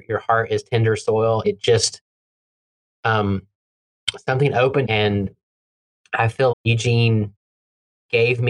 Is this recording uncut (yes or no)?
no